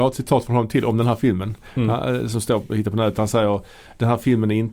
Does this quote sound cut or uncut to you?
uncut